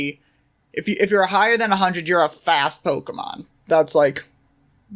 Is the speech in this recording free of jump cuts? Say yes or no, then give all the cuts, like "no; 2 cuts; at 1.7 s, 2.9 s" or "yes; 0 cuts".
yes; 0 cuts